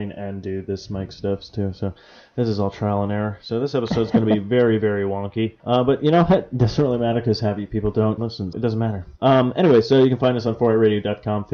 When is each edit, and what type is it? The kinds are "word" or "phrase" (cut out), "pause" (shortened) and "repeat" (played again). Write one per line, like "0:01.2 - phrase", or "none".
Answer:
0:05.6 - pause
0:08.2 - word
0:08.5 - word
0:09.2 - pause